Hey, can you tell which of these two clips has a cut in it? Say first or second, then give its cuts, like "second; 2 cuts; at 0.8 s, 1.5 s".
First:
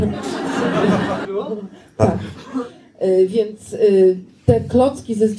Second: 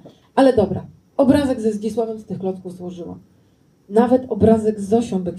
first; 1 cut; at 1.2 s